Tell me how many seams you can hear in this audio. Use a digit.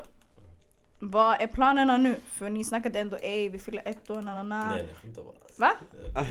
1